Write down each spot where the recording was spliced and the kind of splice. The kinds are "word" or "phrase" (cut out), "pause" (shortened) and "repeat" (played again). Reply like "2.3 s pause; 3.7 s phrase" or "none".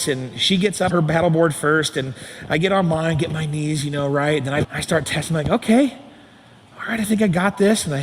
0.9 s word; 4.6 s phrase